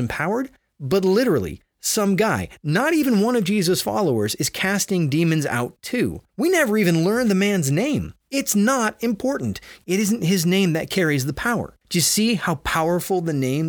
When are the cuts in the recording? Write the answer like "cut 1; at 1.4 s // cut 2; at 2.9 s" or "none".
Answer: cut 1; at 6.3 s // cut 2; at 8.2 s // cut 3; at 11.8 s